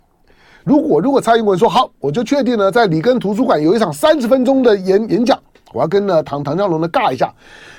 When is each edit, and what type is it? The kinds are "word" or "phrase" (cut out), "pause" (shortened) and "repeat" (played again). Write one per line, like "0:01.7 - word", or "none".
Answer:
none